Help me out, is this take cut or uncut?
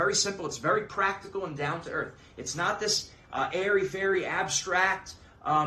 uncut